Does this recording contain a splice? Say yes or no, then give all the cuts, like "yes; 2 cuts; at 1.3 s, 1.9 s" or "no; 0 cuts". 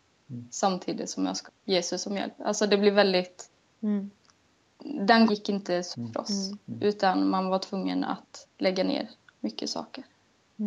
yes; 5 cuts; at 1.5 s, 3.6 s, 5.3 s, 5.9 s, 8.5 s